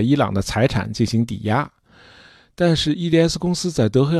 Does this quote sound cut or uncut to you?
uncut